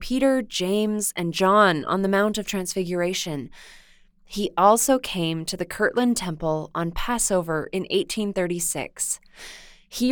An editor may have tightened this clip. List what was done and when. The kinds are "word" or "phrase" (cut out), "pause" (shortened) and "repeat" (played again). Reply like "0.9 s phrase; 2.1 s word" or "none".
none